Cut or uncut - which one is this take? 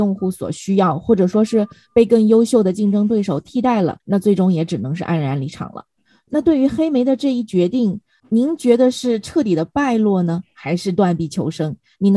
cut